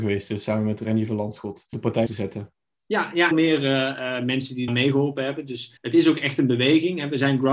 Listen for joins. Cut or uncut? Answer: cut